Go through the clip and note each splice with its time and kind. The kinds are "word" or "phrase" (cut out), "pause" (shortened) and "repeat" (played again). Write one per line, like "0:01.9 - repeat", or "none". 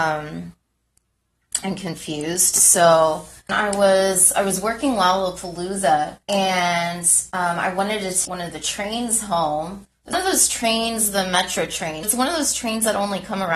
0:03.5 - phrase
0:06.2 - pause
0:08.3 - word
0:10.1 - word
0:12.0 - word